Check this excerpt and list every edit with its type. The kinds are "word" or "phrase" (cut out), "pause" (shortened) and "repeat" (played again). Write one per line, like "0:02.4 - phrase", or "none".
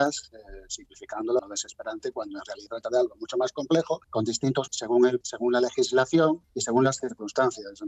0:01.4 - word
0:02.7 - word
0:04.0 - pause
0:04.7 - word
0:05.2 - word
0:06.4 - pause